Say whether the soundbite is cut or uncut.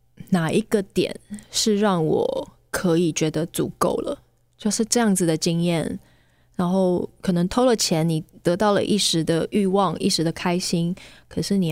uncut